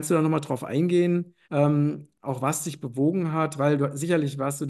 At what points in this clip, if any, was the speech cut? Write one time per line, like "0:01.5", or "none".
0:01.4

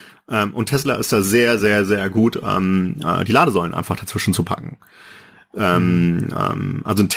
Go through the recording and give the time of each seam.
none

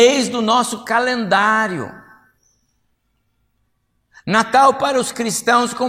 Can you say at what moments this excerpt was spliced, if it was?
none

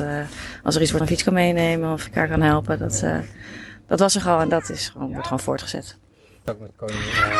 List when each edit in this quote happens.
0:01.0
0:02.1
0:04.2

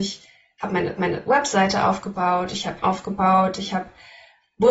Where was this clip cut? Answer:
0:01.0
0:02.8

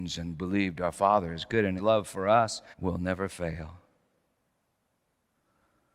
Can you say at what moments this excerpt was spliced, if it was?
0:01.8
0:02.7

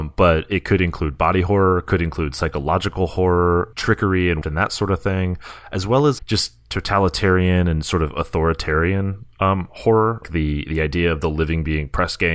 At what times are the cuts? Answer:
0:03.7
0:04.4
0:06.2
0:10.2

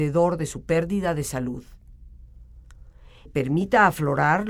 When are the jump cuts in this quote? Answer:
0:03.3

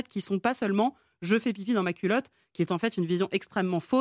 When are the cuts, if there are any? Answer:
none

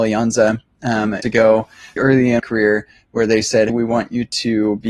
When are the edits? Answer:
0:01.2
0:02.0
0:02.4
0:03.7

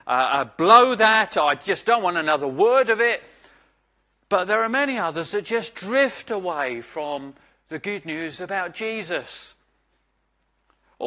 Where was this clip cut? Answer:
none

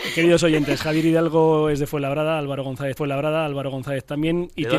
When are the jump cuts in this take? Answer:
0:03.0

